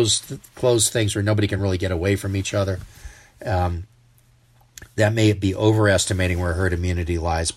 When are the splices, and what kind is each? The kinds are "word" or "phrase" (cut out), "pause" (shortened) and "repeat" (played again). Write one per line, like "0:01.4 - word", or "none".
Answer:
none

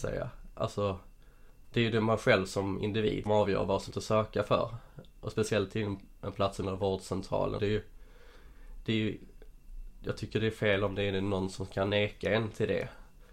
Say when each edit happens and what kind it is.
0:03.3 - word
0:03.9 - phrase
0:06.6 - word
0:07.6 - word

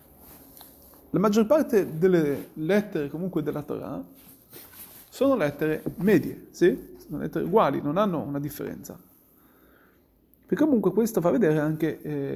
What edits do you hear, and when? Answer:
none

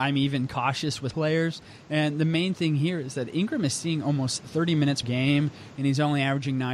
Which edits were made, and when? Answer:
0:01.1 - word
0:05.0 - word

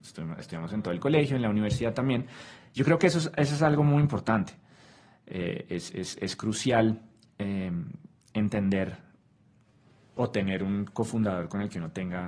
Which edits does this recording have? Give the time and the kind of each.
none

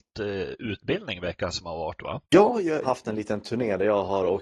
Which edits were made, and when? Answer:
0:02.2 - pause
0:02.8 - phrase

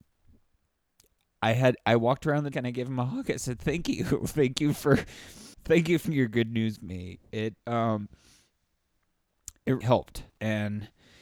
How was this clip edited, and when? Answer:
0:02.5 - word
0:05.5 - pause
0:06.0 - word
0:06.8 - word
0:07.6 - pause
0:09.8 - word
0:10.3 - pause

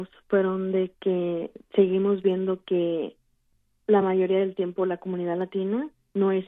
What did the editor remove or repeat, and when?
none

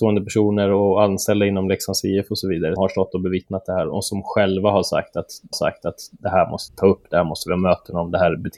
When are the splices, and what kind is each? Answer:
0:02.8 - word
0:05.5 - repeat
0:06.7 - word

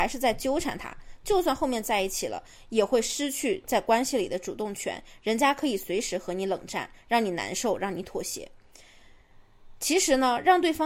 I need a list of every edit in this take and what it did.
none

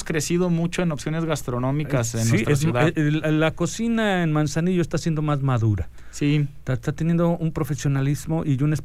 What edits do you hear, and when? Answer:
none

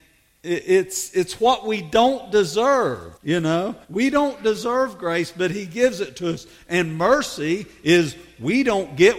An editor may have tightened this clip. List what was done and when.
0:03.2 - pause
0:03.8 - pause

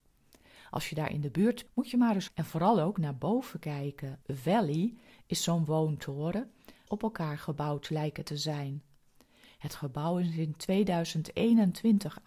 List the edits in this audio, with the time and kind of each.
0:01.7 - word
0:02.3 - word
0:04.2 - pause
0:06.9 - phrase

